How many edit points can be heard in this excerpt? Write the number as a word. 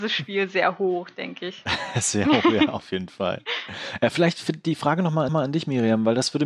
one